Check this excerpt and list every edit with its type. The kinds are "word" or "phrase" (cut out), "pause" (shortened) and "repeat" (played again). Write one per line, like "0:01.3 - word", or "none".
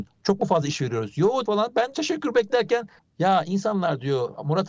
0:01.5 - word
0:01.9 - word
0:03.0 - pause